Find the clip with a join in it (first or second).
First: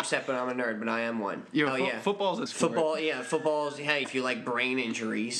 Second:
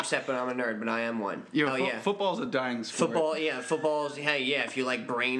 first